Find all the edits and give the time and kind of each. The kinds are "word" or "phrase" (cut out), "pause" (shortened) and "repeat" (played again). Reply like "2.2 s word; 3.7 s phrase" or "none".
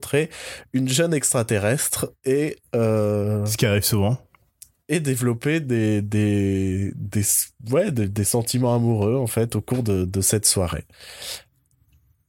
none